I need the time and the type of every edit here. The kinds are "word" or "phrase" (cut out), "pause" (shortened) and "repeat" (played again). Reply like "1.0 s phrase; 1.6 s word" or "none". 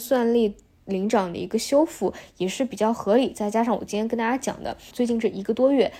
4.9 s phrase